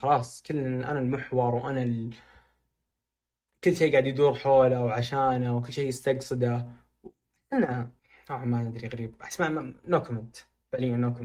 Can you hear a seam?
yes; 1 cut; at 8.0 s

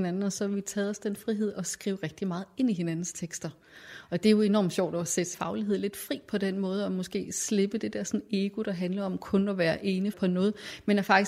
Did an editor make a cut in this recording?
yes; 2 cuts; at 5.3 s, 10.1 s

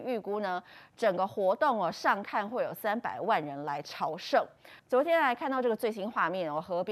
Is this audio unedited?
no; 1 cut; at 4.8 s

